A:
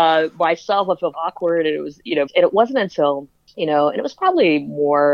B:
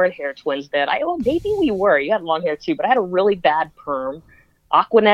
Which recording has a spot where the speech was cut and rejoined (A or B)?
A